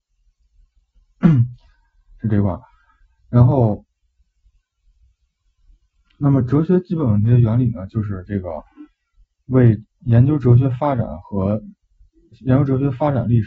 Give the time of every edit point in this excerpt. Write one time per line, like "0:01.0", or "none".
none